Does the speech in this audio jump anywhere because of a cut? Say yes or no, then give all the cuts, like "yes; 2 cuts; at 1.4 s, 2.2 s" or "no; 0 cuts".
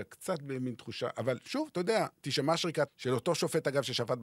yes; 2 cuts; at 2.1 s, 2.9 s